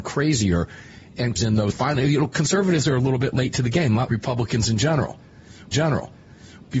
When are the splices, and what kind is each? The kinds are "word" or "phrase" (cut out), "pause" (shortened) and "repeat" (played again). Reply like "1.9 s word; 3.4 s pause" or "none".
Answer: 1.4 s word; 1.7 s word; 4.1 s word; 5.7 s repeat